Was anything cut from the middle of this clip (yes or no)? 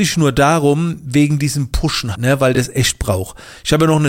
yes